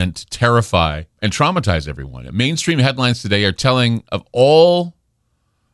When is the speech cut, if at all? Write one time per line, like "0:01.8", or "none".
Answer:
0:01.1